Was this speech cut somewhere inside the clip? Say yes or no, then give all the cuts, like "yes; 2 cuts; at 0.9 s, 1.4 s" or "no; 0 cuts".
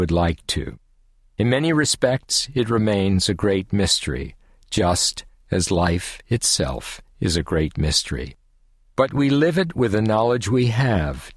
no; 0 cuts